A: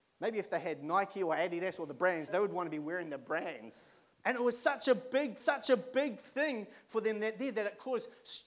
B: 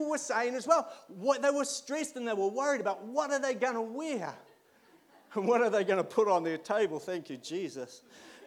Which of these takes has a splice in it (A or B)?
A